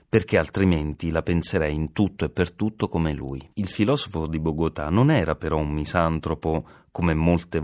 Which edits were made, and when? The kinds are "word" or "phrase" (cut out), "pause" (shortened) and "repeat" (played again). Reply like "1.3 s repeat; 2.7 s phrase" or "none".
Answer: 3.5 s pause